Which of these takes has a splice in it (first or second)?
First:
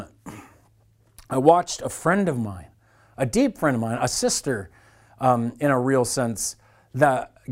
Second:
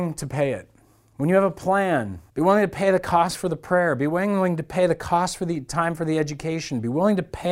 second